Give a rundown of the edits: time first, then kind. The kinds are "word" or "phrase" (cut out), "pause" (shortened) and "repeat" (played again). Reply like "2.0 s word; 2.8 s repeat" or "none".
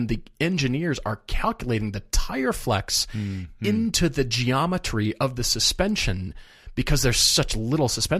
none